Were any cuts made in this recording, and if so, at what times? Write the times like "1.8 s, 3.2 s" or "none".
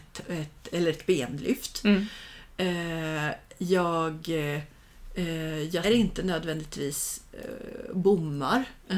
5.8 s